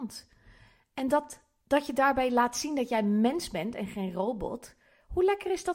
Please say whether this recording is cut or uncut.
uncut